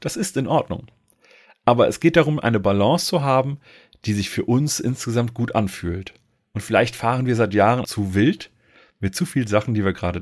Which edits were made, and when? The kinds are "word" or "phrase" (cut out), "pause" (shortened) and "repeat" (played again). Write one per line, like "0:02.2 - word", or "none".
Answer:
0:07.8 - word